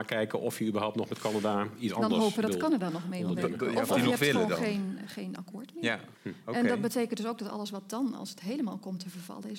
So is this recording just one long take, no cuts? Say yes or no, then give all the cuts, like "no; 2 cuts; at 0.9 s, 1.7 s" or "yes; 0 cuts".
no; 1 cut; at 6.1 s